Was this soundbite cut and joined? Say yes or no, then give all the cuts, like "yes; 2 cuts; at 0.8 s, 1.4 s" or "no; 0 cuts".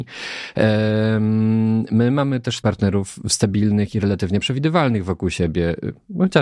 yes; 1 cut; at 2.6 s